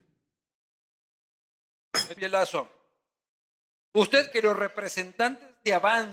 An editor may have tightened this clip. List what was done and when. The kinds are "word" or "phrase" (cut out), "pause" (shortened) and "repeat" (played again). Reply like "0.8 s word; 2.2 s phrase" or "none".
2.2 s phrase; 4.3 s word